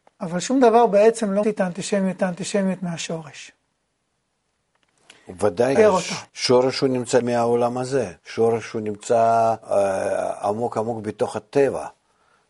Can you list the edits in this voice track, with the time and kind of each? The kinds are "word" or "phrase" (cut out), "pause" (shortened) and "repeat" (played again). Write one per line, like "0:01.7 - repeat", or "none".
0:01.4 - word
0:02.2 - repeat
0:05.8 - word
0:06.3 - pause
0:07.2 - word
0:08.2 - pause
0:09.6 - pause